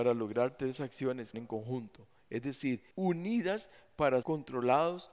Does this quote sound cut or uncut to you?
cut